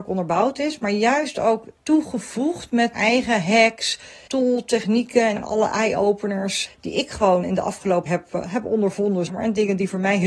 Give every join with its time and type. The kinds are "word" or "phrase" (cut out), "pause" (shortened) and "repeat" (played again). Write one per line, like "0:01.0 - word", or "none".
0:01.8 - word
0:02.9 - word
0:04.3 - word
0:05.4 - word
0:06.7 - word
0:07.4 - word
0:08.1 - word
0:09.3 - word

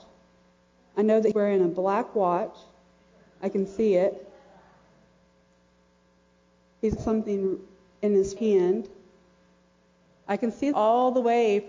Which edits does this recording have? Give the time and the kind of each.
0:01.3 - word
0:07.0 - word
0:08.4 - word
0:10.7 - word

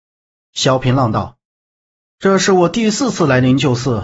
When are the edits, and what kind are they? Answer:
0:01.5 - pause

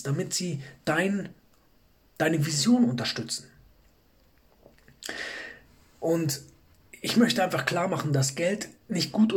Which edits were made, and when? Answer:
none

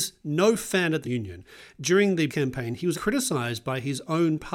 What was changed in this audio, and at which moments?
0:01.0 - word
0:02.3 - word
0:02.9 - word

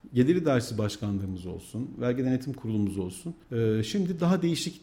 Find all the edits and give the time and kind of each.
0:03.4 - pause

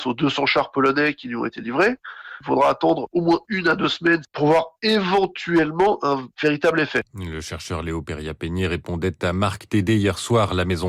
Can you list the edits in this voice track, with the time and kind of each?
none

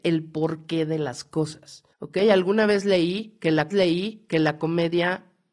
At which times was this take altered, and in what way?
0:01.9 - pause
0:03.7 - repeat

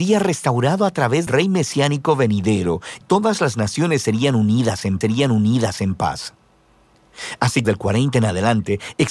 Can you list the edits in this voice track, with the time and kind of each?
0:01.3 - word
0:03.0 - word
0:05.0 - repeat
0:07.6 - phrase

